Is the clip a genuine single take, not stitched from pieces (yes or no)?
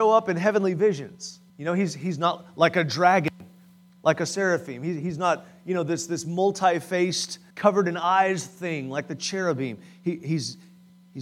no